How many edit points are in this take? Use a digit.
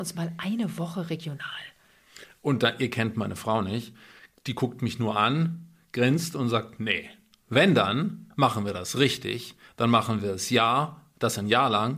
0